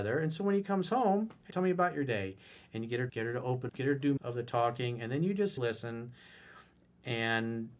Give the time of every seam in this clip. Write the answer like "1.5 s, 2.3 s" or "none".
1.5 s, 3.1 s, 3.7 s, 4.2 s, 5.6 s